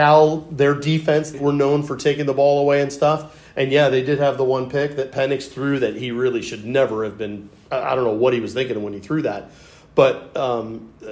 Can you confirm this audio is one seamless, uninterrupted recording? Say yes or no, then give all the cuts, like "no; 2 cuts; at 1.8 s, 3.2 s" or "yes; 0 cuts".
no; 1 cut; at 1.3 s